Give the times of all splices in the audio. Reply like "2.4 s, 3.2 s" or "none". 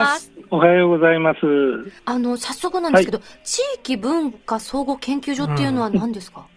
2.0 s